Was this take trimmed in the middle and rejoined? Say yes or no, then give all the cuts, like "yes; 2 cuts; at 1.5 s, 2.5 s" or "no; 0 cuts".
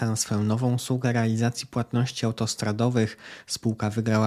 no; 0 cuts